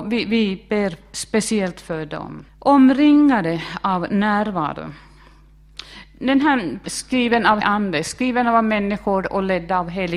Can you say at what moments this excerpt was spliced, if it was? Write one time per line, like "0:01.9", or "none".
0:02.5
0:06.8
0:07.6